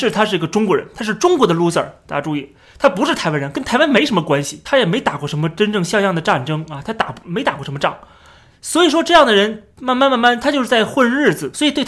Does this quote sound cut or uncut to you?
uncut